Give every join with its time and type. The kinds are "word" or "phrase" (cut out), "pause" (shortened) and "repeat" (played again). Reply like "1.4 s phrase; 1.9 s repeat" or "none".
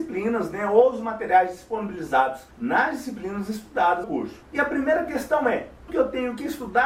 2.5 s pause; 4.0 s phrase; 4.4 s pause; 5.9 s word